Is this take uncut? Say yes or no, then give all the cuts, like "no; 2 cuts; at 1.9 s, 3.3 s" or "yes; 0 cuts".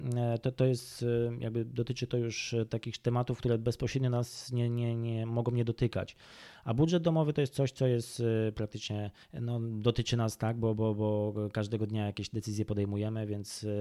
no; 1 cut; at 9.2 s